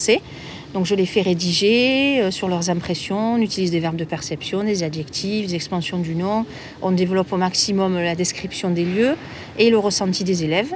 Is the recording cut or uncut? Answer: uncut